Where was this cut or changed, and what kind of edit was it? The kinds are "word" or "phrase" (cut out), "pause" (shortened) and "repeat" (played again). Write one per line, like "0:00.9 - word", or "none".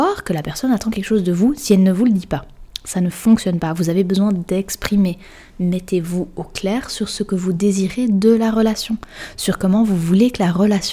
none